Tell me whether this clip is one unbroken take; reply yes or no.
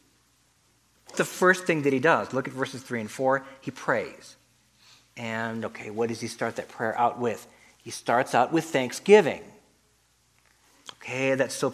no